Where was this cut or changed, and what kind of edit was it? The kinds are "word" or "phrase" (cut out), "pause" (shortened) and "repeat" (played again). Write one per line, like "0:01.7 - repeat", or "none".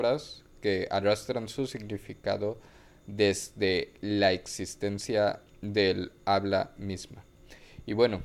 none